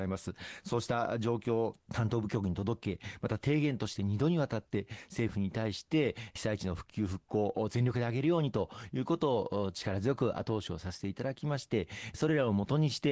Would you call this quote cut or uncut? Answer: cut